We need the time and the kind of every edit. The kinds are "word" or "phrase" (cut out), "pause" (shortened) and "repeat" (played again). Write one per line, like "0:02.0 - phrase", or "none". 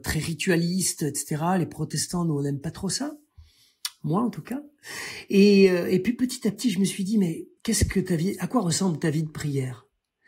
0:07.6 - pause